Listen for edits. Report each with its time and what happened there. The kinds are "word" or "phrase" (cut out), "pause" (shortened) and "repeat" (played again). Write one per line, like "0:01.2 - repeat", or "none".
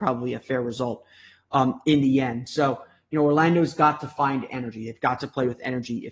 none